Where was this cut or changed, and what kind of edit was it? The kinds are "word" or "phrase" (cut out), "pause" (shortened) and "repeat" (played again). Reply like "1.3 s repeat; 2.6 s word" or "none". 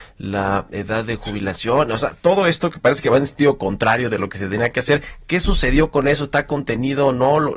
none